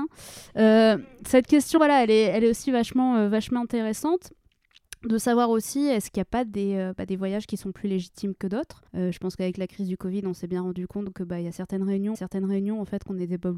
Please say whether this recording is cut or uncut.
cut